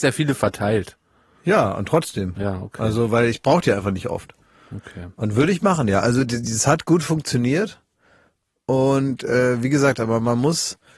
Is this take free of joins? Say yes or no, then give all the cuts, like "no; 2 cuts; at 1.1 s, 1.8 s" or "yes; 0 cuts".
yes; 0 cuts